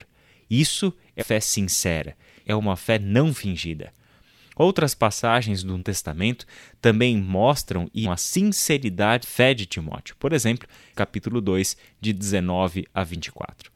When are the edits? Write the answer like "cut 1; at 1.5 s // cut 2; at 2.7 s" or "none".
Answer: cut 1; at 1.2 s // cut 2; at 2.4 s // cut 3; at 5.8 s // cut 4; at 8.0 s // cut 5; at 9.2 s // cut 6; at 10.9 s